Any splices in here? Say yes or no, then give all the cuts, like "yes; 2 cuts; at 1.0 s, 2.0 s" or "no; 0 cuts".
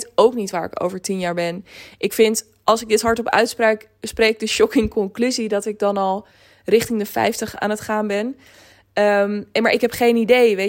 no; 0 cuts